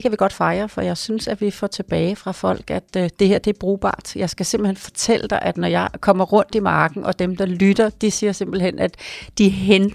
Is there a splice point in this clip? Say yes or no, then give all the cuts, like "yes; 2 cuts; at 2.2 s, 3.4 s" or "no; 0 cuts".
no; 0 cuts